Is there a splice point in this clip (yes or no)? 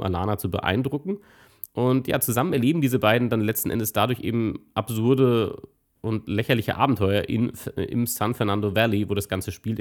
no